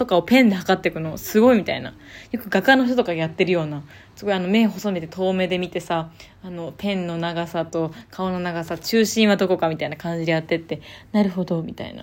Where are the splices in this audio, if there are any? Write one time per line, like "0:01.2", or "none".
none

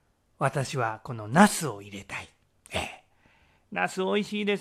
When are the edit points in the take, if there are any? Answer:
none

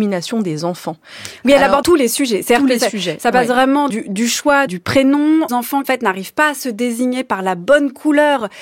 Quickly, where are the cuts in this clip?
0:01.8
0:03.9
0:04.7
0:05.5
0:05.8

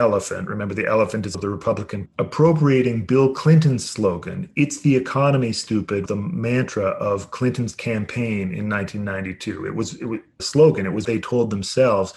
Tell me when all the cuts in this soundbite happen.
0:01.3
0:02.1
0:06.1
0:10.4
0:11.0

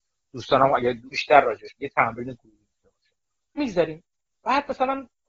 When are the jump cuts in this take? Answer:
0:01.1
0:01.8
0:03.6

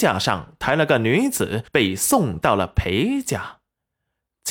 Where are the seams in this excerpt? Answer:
0:01.7

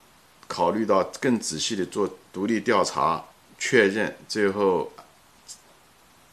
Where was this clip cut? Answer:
0:02.3
0:03.3

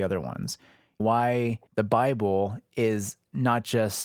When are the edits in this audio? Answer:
0:01.0
0:01.7

